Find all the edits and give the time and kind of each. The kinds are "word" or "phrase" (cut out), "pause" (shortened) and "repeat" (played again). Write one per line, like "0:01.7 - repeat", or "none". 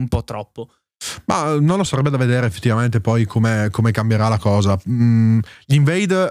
0:01.9 - word

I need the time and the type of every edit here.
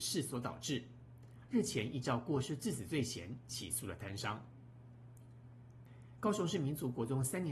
none

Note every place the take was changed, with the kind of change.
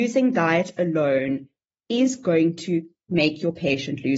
none

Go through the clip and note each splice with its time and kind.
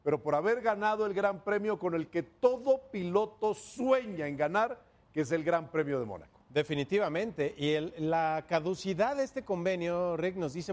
none

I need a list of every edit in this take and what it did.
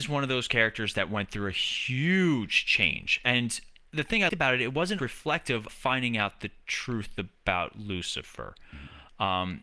0:04.3 - word
0:05.0 - word
0:05.7 - word

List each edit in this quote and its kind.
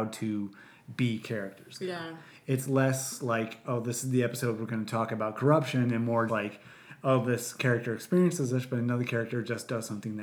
0:06.3 - word

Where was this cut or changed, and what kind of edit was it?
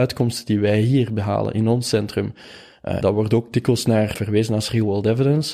0:03.0 - word
0:04.1 - word

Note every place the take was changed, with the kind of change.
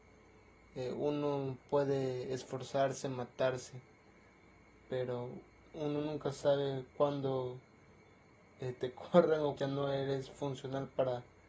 0:06.9 - pause
0:09.6 - word

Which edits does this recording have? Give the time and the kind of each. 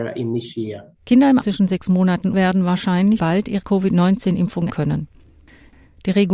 0:00.9 - pause
0:01.4 - word
0:02.3 - phrase
0:03.2 - word
0:03.6 - word
0:04.7 - word

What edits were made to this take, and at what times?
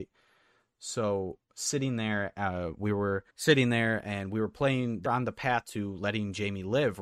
0:01.4 - pause
0:03.3 - pause
0:05.1 - word

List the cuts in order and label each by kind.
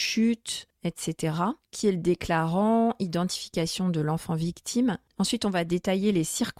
none

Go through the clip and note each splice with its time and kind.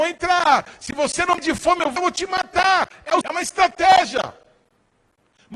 0:01.4 - word
0:02.0 - word
0:03.2 - word

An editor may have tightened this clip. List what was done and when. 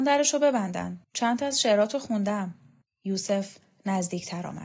0:01.0 - pause
0:02.8 - pause

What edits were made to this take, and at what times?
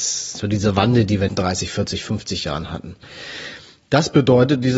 0:01.3 - phrase

